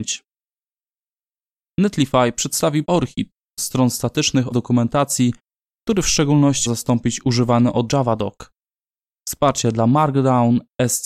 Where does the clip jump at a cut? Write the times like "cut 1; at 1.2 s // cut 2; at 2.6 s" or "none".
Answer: cut 1; at 2.8 s // cut 2; at 3.6 s // cut 3; at 4.5 s // cut 4; at 6.7 s // cut 5; at 7.9 s